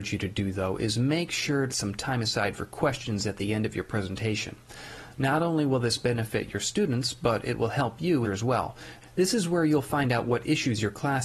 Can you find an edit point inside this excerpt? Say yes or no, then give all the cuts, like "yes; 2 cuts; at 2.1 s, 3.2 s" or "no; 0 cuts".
yes; 2 cuts; at 1.7 s, 8.2 s